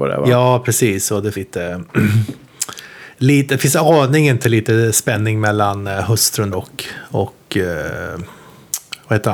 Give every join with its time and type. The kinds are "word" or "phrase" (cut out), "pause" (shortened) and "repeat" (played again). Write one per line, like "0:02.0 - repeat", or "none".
0:01.3 - word
0:06.5 - word